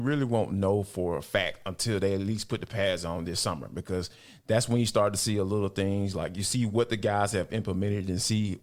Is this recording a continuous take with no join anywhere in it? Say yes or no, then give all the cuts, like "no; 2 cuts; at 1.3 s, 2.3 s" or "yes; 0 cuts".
yes; 0 cuts